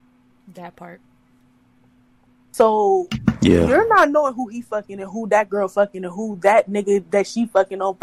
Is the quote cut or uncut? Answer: uncut